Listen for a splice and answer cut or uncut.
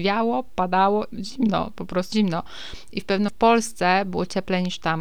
cut